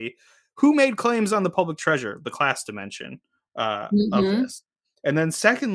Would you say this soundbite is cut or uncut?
uncut